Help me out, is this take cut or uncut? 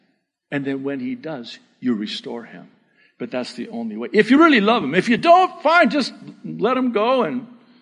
uncut